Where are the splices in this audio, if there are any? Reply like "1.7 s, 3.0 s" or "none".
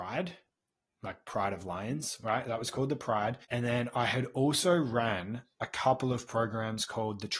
3.4 s

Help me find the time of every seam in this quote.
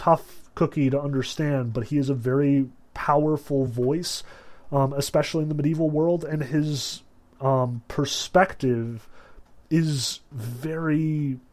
none

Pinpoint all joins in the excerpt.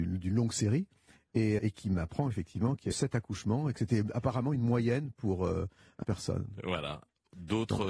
1.6 s, 2.9 s, 6.0 s

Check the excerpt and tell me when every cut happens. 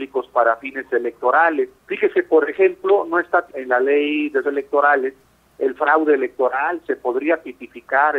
1.8 s, 3.5 s, 4.4 s

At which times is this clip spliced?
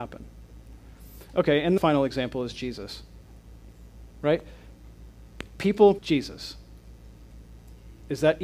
1.8 s, 6.0 s

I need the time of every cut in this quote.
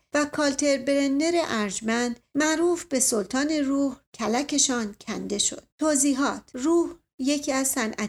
4.1 s, 5.7 s

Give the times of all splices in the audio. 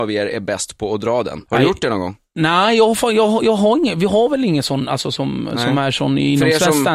1.5 s

